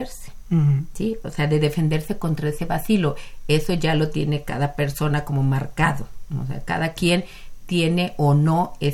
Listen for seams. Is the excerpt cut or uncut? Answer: uncut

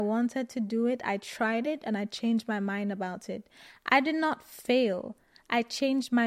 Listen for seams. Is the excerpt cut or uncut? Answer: uncut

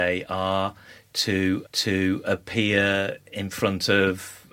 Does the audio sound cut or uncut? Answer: cut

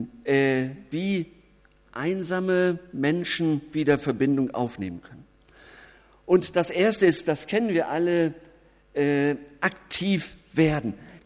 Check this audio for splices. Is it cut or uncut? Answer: uncut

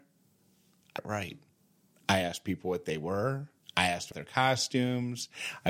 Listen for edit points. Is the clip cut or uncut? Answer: cut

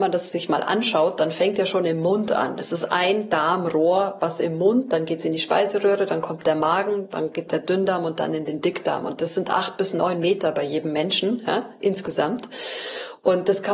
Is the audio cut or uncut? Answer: uncut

